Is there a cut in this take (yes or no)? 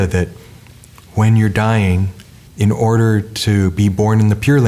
yes